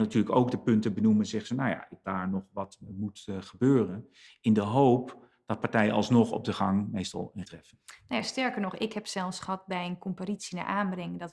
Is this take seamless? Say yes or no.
no